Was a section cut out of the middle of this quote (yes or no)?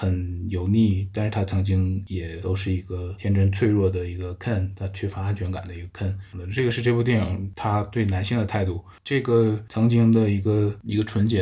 no